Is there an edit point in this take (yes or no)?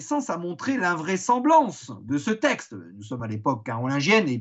no